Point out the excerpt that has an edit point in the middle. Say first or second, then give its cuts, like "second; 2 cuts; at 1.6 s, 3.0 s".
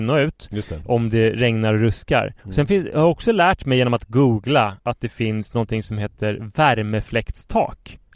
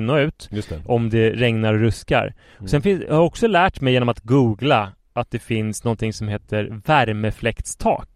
first; 2 cuts; at 2.4 s, 4.8 s